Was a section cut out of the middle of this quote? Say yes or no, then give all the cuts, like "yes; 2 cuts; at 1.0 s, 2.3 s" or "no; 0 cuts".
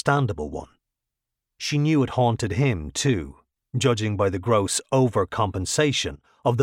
no; 0 cuts